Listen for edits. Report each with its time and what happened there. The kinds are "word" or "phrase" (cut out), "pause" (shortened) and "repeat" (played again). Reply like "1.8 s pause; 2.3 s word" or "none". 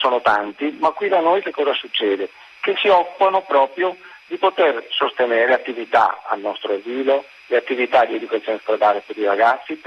none